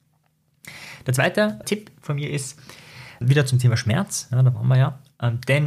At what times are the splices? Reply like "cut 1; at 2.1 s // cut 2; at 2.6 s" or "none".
cut 1; at 1.6 s // cut 2; at 3.2 s